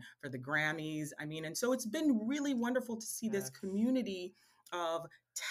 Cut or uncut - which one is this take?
uncut